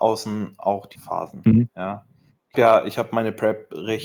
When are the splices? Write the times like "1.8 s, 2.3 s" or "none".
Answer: 1.0 s, 2.5 s